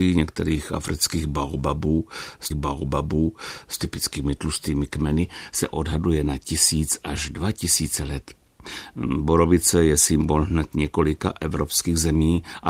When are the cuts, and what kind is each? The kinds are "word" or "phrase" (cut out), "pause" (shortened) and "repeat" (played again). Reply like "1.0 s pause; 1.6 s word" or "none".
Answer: 2.5 s repeat